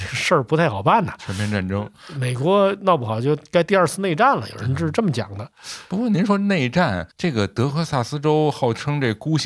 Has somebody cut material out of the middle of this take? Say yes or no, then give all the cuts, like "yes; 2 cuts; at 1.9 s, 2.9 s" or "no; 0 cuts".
yes; 1 cut; at 7.1 s